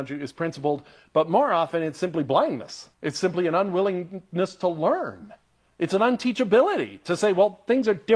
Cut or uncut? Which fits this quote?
cut